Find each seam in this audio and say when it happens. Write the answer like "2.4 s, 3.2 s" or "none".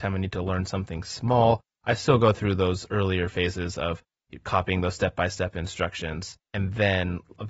6.4 s